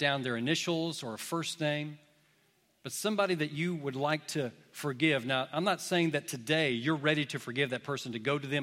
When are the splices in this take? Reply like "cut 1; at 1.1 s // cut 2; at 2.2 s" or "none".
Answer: none